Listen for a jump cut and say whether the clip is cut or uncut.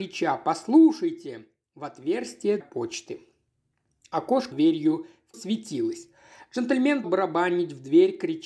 cut